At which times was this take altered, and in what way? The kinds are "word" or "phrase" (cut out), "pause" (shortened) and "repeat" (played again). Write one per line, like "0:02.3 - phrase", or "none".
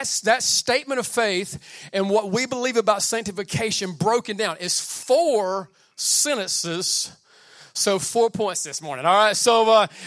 none